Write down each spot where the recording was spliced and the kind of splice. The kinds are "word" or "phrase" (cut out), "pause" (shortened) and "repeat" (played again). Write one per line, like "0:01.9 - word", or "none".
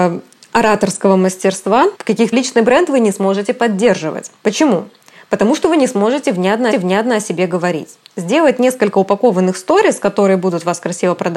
0:01.9 - word
0:02.3 - phrase
0:04.4 - pause
0:06.7 - repeat